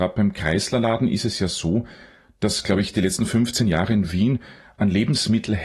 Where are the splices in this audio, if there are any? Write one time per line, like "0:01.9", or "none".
none